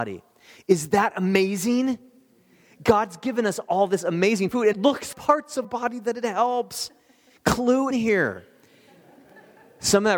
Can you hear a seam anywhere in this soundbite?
yes; 4 cuts; at 4.7 s, 5.1 s, 5.6 s, 7.9 s

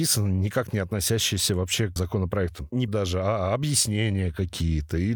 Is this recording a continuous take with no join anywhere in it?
no; 2 cuts; at 2.0 s, 2.9 s

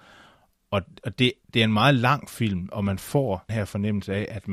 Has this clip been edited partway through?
yes; 2 cuts; at 1.4 s, 3.5 s

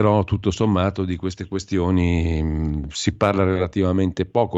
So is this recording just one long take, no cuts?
yes; 0 cuts

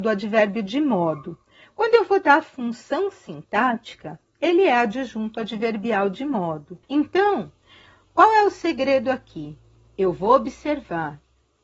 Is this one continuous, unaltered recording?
no; 1 cut; at 6.8 s

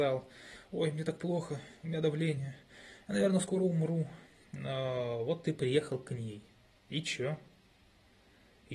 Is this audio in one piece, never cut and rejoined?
yes; 0 cuts

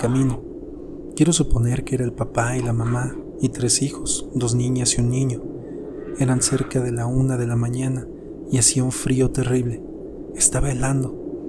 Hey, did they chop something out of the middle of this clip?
no; 0 cuts

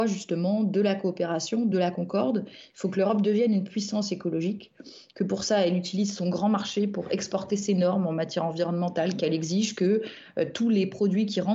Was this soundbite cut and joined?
no; 0 cuts

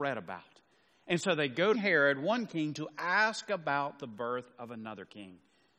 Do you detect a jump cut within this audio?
yes; 1 cut; at 1.7 s

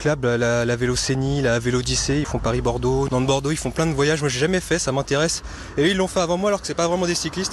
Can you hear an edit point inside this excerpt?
no; 0 cuts

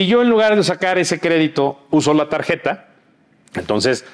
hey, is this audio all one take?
yes; 0 cuts

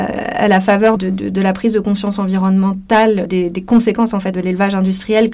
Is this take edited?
yes; 3 cuts; at 1.0 s, 3.3 s, 4.3 s

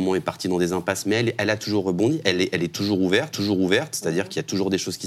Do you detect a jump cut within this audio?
yes; 1 cut; at 3.3 s

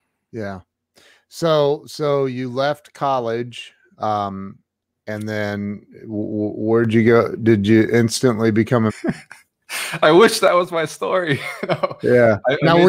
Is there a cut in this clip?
yes; 1 cut; at 8.9 s

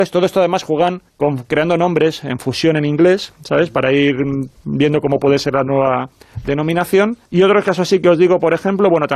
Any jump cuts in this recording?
yes; 2 cuts; at 1.1 s, 7.2 s

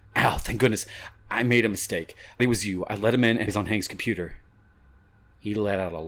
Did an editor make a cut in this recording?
yes; 2 cuts; at 2.4 s, 3.5 s

